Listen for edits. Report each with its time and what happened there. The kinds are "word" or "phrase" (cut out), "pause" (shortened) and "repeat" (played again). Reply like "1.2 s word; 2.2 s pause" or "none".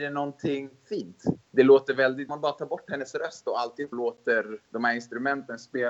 1.4 s pause; 2.3 s phrase; 3.9 s phrase; 4.6 s pause

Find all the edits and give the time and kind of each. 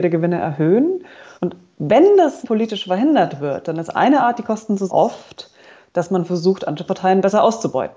1.3 s pause; 2.4 s word; 4.9 s word

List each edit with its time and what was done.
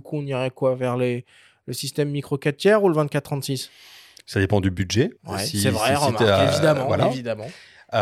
5.2 s pause

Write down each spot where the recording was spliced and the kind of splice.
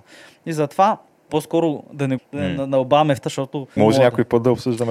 1.3 s word; 2.2 s word; 3.2 s word; 3.8 s word

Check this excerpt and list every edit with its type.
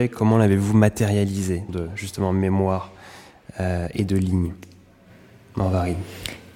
1.7 s phrase

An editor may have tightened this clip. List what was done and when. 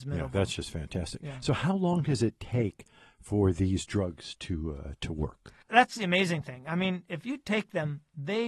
5.6 s pause

